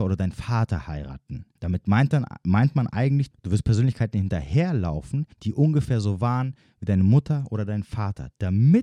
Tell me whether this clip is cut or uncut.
cut